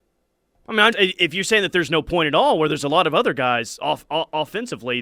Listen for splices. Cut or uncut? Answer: cut